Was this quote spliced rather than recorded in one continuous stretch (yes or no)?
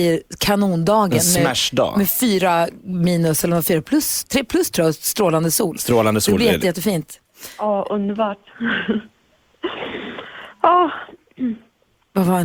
no